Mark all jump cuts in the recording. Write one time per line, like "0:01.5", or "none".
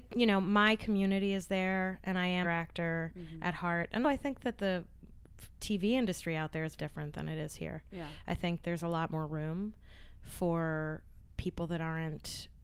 0:02.4
0:04.0
0:06.8
0:11.4